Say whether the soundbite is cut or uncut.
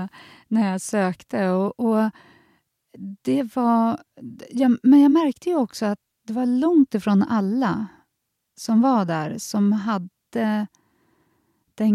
uncut